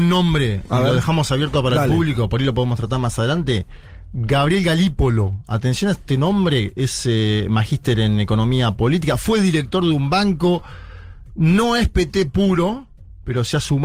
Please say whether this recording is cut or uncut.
uncut